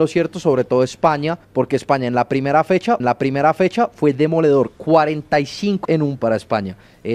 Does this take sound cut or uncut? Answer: cut